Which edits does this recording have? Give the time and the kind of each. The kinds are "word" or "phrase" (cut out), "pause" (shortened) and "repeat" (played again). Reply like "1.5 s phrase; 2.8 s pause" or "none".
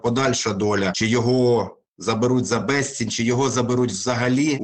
none

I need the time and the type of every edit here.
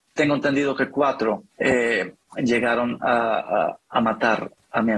1.5 s pause

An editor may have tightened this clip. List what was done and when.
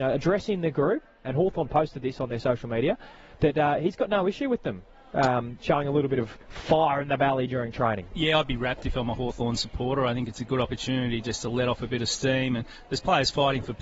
6.4 s pause

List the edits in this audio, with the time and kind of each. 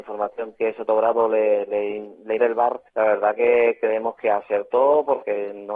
2.4 s phrase; 2.9 s pause

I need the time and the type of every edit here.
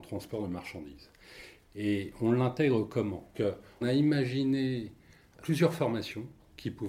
3.3 s word; 3.8 s word; 5.4 s word

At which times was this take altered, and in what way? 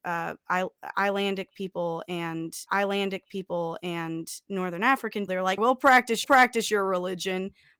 2.7 s repeat; 5.3 s word; 5.6 s word; 6.2 s repeat

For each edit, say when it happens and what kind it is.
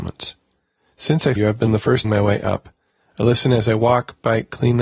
1.4 s word; 1.7 s phrase; 2.0 s phrase

